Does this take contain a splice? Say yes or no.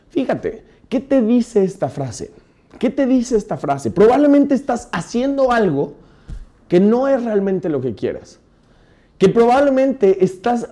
no